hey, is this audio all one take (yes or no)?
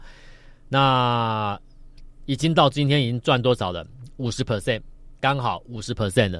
no